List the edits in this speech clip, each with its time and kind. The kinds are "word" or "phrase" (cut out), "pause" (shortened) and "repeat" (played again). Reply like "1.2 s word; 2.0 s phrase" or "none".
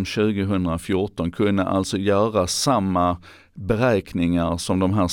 none